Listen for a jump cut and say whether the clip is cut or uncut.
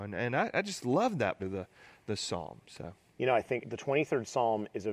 cut